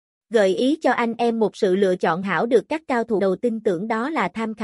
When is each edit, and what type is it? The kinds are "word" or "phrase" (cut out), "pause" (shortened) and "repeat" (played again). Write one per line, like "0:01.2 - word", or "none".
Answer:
0:02.2 - word
0:03.2 - word